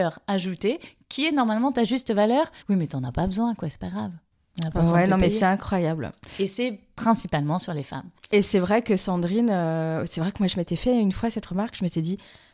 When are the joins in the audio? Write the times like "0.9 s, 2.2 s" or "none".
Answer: 2.6 s